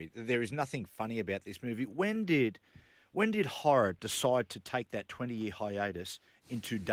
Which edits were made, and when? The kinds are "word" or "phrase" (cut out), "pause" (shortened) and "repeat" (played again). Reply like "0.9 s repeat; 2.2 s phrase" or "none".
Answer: none